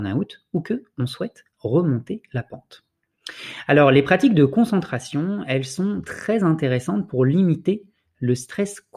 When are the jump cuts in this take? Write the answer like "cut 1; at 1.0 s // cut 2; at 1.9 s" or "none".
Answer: none